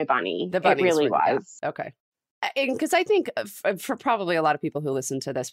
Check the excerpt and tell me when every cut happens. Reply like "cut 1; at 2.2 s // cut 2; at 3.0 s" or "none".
none